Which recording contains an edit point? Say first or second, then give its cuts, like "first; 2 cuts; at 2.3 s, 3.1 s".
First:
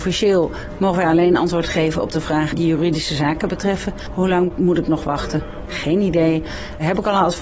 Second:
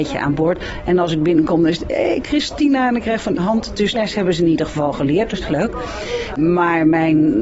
second; 3 cuts; at 3.4 s, 3.9 s, 5.4 s